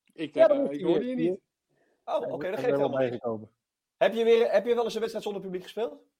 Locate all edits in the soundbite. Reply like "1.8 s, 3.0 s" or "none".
none

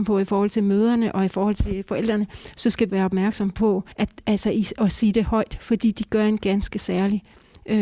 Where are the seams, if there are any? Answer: 2.9 s, 3.9 s

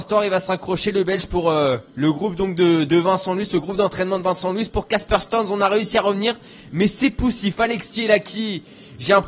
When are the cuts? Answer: 1.9 s

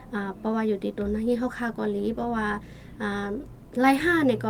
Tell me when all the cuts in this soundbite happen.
none

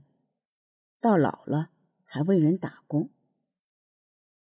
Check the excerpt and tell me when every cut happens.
none

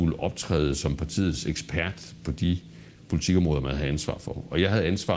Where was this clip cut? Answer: none

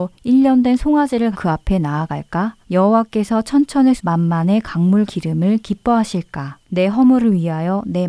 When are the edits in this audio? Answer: 1.3 s, 2.6 s, 4.0 s, 5.1 s, 6.6 s

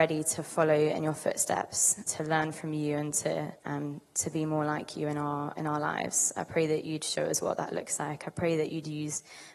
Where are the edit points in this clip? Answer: 2.1 s, 3.6 s

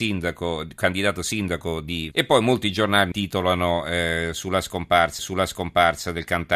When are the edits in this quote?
2.1 s, 3.1 s, 5.2 s

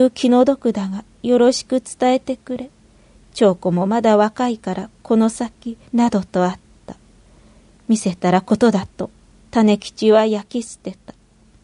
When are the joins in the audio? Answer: 5.9 s

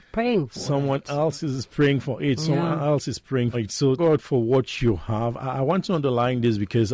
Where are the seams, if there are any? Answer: 3.5 s, 4.0 s

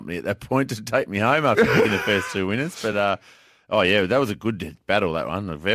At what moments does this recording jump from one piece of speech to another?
none

